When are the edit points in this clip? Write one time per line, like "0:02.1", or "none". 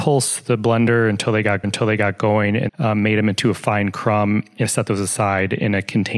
0:01.6
0:02.7
0:04.6